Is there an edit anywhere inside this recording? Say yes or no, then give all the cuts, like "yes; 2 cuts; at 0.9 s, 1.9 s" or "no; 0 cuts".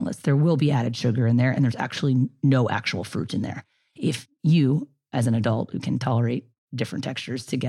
no; 0 cuts